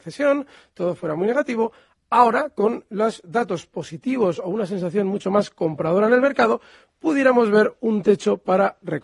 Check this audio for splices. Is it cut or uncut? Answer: uncut